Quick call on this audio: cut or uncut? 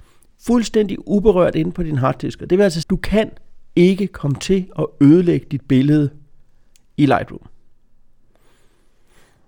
cut